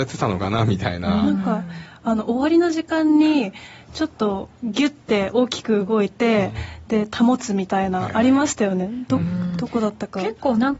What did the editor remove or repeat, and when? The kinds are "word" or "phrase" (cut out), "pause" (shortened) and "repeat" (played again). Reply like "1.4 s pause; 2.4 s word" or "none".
4.5 s pause